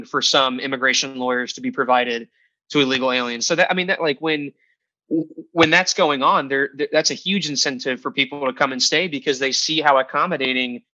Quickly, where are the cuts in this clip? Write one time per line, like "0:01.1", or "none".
none